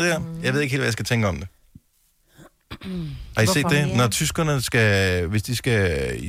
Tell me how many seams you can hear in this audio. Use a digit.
0